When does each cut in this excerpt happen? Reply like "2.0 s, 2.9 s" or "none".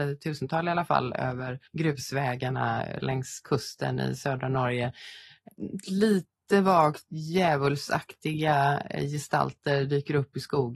1.7 s

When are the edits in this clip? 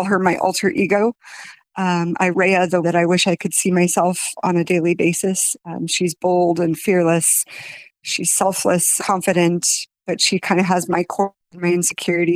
2.3 s, 2.8 s, 9.0 s

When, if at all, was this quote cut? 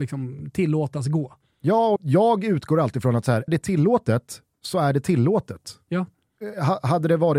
2.0 s, 3.5 s

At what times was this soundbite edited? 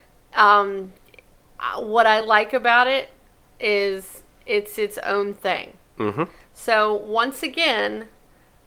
none

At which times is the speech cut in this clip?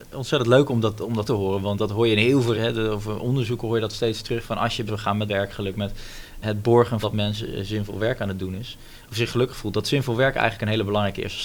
1.3 s, 2.5 s, 4.9 s, 5.3 s, 6.4 s, 7.0 s

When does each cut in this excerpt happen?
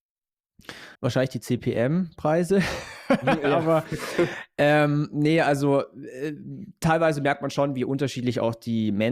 0.9 s

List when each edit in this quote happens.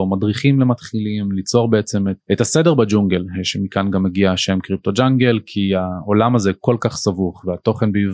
none

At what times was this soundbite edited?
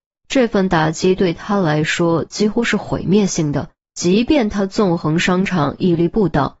3.7 s

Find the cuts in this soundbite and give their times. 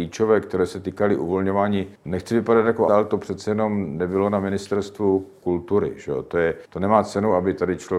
2.0 s, 2.9 s, 6.6 s

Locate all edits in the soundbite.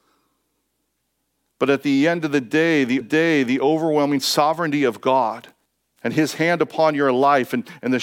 3.0 s, 5.7 s

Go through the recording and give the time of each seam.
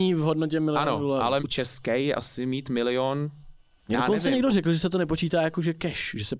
1.4 s

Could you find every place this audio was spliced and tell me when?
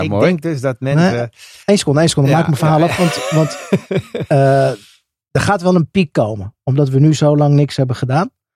1.6 s

